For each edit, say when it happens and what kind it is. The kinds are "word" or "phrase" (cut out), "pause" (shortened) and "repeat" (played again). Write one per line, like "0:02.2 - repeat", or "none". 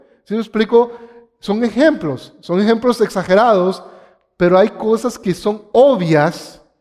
none